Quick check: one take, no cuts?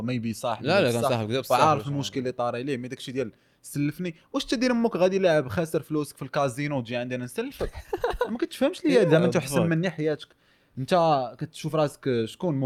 yes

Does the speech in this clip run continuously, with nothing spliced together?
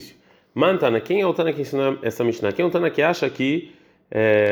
yes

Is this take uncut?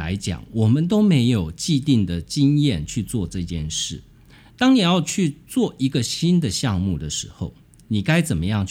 yes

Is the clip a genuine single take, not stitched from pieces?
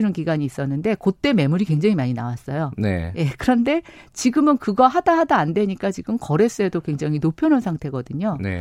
yes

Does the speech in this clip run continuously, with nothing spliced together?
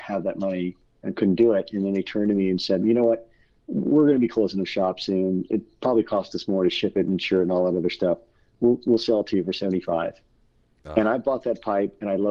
yes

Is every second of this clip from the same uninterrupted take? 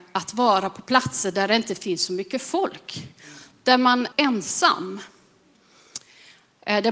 no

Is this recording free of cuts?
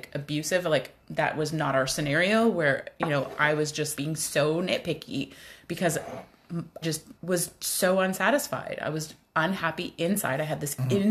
no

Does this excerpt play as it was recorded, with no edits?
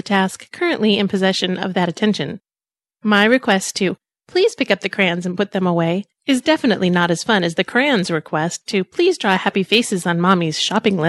yes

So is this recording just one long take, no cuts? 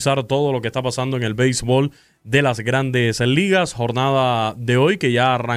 yes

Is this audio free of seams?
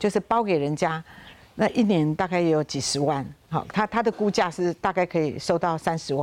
yes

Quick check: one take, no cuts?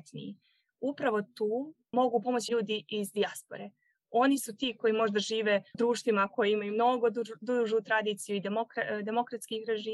no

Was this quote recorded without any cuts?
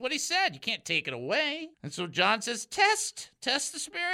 no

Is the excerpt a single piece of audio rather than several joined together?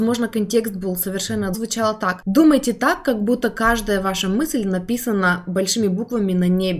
no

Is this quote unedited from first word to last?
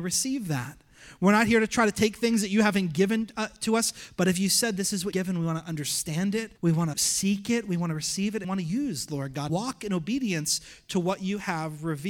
no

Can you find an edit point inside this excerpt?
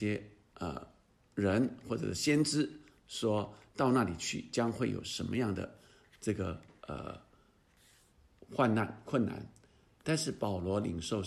no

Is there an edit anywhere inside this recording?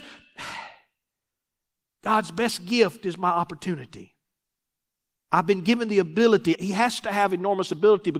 yes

